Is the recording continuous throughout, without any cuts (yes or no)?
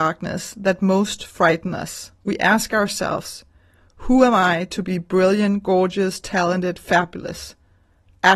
yes